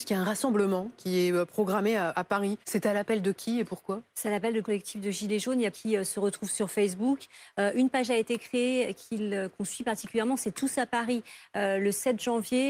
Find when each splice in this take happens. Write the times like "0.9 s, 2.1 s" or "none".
2.6 s, 4.6 s, 5.7 s